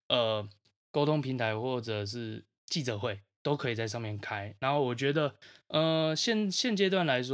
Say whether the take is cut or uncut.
uncut